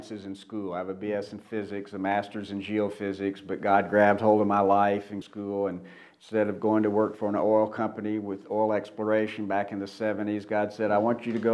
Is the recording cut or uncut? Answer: cut